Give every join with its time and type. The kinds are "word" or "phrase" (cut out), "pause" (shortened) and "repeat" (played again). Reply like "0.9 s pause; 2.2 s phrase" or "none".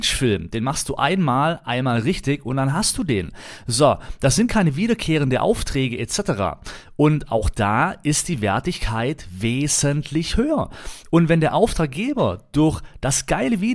none